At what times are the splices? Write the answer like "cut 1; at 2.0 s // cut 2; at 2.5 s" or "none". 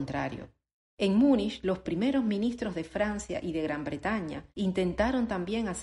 cut 1; at 4.5 s